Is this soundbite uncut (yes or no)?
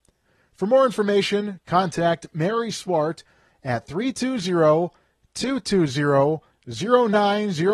yes